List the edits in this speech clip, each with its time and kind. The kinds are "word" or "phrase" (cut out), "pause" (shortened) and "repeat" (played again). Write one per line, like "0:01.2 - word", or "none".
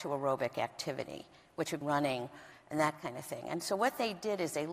0:01.8 - word